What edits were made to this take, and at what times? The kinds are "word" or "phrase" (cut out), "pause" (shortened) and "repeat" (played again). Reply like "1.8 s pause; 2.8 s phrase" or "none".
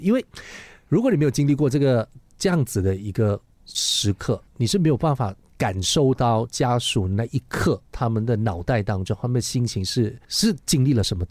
4.5 s pause